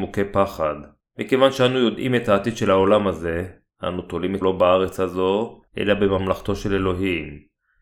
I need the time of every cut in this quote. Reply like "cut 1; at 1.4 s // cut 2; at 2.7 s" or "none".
cut 1; at 1.0 s // cut 2; at 3.7 s // cut 3; at 4.4 s // cut 4; at 5.7 s